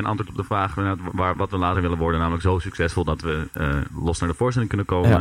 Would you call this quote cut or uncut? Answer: uncut